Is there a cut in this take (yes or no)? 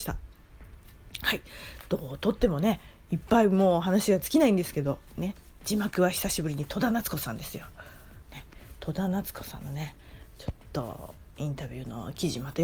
no